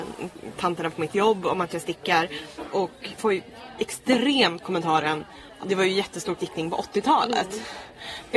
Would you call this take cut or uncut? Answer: cut